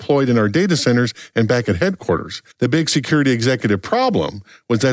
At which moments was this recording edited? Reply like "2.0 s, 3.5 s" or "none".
2.5 s